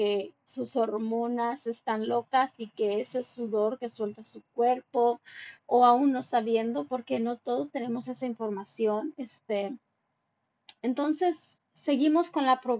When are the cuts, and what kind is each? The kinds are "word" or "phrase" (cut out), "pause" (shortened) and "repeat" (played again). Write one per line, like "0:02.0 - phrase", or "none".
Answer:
0:05.6 - pause